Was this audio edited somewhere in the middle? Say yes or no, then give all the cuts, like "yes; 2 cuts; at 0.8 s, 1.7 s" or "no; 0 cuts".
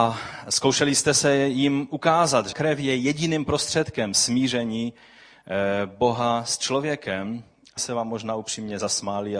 yes; 2 cuts; at 2.5 s, 7.8 s